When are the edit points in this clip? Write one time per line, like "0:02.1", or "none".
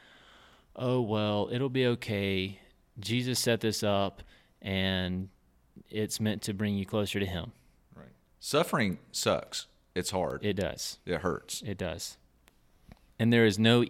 none